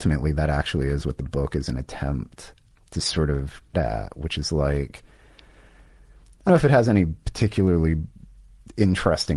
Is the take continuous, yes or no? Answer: no